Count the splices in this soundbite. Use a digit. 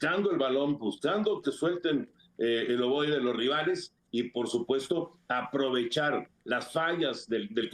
0